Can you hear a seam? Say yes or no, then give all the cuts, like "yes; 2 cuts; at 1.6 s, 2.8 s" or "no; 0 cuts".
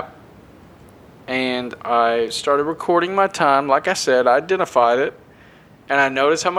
no; 0 cuts